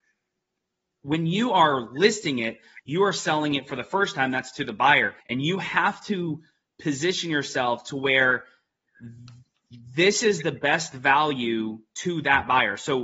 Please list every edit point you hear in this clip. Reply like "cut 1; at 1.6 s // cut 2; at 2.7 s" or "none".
cut 1; at 5.2 s